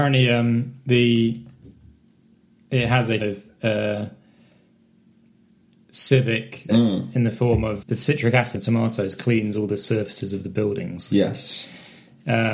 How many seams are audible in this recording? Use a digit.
4